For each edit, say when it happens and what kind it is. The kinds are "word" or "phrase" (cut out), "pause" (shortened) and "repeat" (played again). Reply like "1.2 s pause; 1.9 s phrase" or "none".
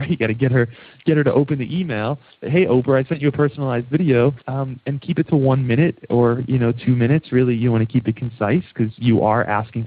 4.4 s pause